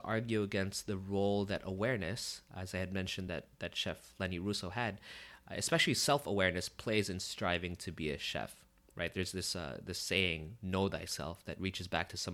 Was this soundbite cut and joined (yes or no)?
no